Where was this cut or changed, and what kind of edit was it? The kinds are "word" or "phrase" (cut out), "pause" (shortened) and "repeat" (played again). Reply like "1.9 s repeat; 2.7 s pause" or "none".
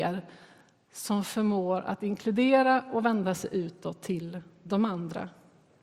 none